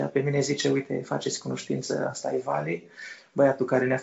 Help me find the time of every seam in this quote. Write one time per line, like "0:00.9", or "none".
none